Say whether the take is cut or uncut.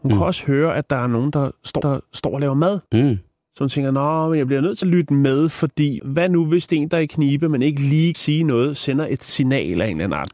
cut